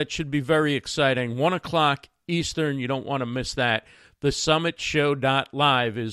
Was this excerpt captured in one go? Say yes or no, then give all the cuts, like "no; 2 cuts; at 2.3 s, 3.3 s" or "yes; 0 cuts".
yes; 0 cuts